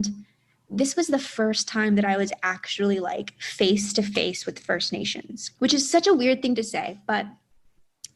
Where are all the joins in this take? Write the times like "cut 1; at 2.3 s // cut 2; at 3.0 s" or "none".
cut 1; at 5.6 s